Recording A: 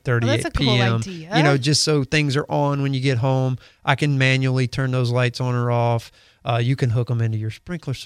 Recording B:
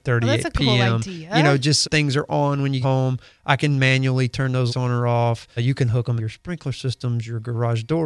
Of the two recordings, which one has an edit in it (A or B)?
B